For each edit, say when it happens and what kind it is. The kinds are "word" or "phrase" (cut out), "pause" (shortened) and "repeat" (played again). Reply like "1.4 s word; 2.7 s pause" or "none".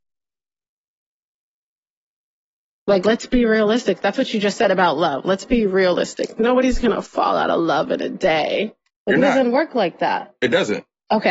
8.9 s pause